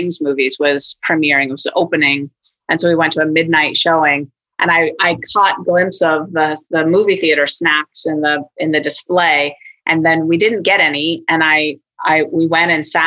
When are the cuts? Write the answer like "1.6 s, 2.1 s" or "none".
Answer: none